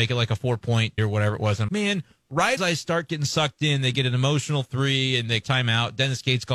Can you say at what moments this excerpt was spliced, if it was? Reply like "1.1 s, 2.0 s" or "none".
1.0 s, 1.7 s, 2.6 s, 5.4 s